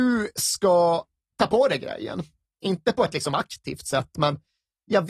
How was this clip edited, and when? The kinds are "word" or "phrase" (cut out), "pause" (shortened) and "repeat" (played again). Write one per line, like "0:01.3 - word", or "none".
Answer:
none

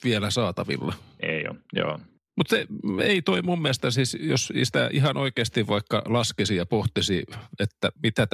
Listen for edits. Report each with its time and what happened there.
none

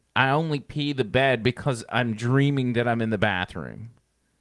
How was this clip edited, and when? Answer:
none

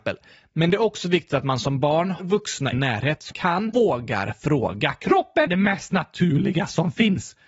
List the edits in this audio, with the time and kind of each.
0:02.2 - word
0:02.7 - word
0:03.3 - word
0:03.7 - word
0:05.5 - word

